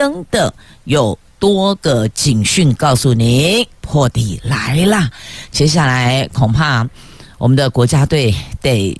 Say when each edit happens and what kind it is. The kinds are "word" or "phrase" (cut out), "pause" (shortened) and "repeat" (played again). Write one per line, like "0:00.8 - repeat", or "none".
0:03.8 - pause